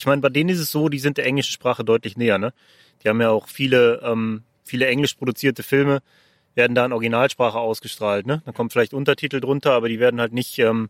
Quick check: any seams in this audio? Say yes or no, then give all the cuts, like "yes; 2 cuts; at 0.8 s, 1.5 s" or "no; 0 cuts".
no; 0 cuts